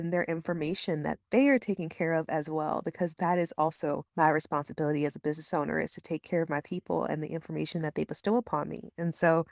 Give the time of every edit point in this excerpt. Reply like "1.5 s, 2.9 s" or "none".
4.1 s